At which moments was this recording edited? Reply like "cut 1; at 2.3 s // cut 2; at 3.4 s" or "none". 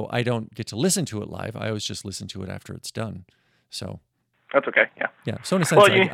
none